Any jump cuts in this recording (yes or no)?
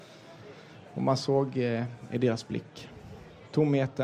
no